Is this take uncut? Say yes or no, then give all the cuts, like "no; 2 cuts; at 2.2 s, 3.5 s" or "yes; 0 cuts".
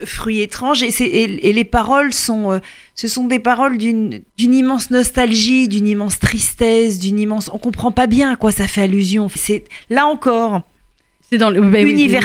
no; 2 cuts; at 4.3 s, 9.4 s